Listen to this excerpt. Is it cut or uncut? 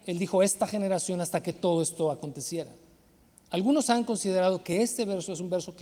uncut